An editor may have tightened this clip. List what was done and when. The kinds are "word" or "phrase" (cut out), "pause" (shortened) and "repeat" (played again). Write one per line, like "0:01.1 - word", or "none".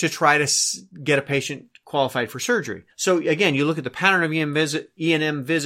0:02.9 - pause

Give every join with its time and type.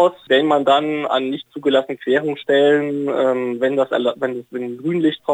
none

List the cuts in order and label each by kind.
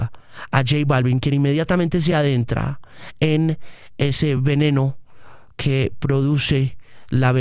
none

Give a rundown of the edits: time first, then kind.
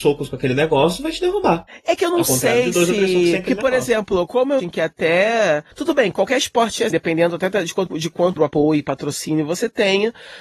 0:04.6 - phrase
0:05.7 - pause
0:06.9 - word
0:07.9 - word
0:08.4 - word

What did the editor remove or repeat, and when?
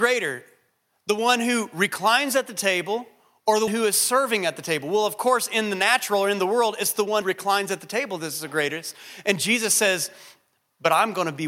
0:03.7 - word
0:07.2 - word

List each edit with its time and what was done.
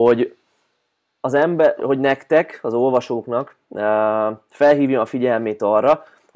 0:01.8 - word

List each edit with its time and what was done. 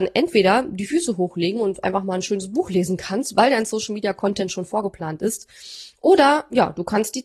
none

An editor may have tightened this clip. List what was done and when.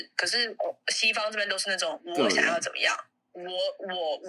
none

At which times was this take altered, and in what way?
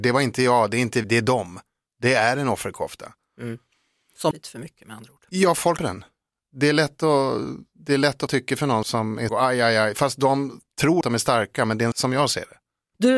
0:01.0 - word
0:04.3 - word
0:05.8 - word
0:08.3 - word
0:08.8 - word
0:09.3 - word
0:11.0 - word
0:11.9 - word

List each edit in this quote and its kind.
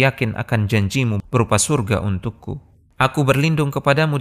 none

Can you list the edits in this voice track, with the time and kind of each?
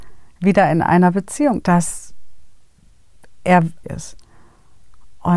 0:01.6 - word
0:03.8 - phrase

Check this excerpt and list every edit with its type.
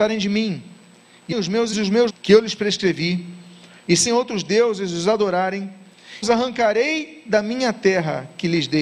0:01.3 - word
0:01.7 - word
0:02.1 - word
0:04.1 - word
0:06.2 - word

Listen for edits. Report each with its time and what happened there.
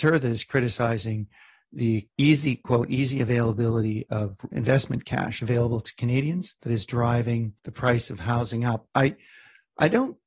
0:02.1 - pause
0:04.5 - word
0:07.6 - pause

